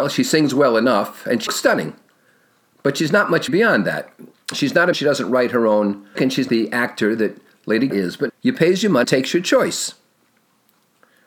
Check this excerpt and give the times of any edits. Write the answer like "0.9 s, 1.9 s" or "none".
1.5 s, 3.5 s, 4.9 s, 6.1 s, 6.5 s, 7.9 s, 8.3 s, 9.0 s

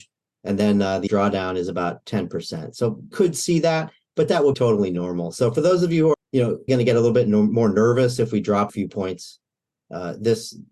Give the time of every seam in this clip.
1.1 s, 3.1 s, 4.5 s, 6.1 s, 6.7 s, 8.7 s

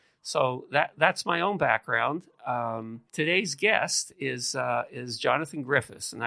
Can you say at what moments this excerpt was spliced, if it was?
3.1 s

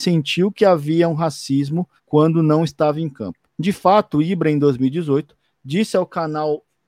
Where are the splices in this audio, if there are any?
2.0 s, 3.5 s

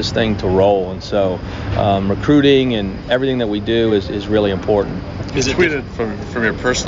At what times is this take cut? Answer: none

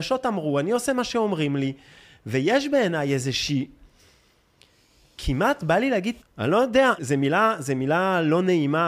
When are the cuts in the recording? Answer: 6.2 s, 7.0 s

